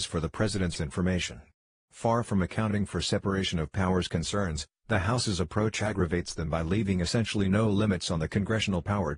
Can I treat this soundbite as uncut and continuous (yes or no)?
yes